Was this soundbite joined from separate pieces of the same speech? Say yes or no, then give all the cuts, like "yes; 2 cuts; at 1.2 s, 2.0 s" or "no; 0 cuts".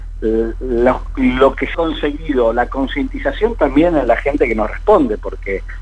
yes; 1 cut; at 1.7 s